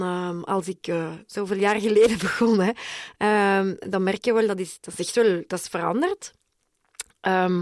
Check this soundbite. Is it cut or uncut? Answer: uncut